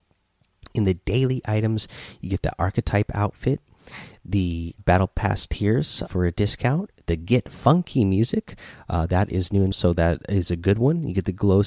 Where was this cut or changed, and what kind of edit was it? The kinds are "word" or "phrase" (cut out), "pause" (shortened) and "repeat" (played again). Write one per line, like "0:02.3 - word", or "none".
0:04.8 - word
0:06.0 - word
0:09.7 - phrase